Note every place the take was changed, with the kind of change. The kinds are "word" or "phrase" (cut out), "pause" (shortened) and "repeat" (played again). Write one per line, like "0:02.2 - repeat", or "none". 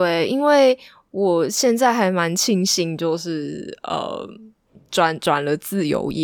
none